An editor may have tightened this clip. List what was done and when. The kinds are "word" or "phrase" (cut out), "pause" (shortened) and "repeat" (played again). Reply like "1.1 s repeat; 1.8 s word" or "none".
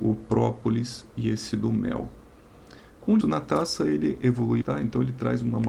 1.5 s word; 3.2 s word; 4.6 s word